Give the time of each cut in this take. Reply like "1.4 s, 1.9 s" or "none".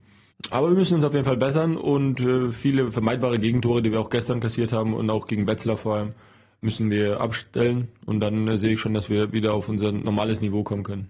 none